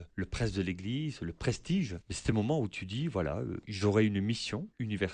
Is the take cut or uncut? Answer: uncut